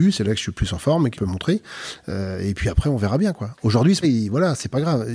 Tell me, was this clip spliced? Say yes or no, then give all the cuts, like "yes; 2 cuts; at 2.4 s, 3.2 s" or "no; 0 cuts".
yes; 2 cuts; at 1.1 s, 4.0 s